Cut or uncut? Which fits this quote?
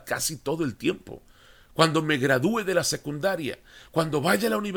uncut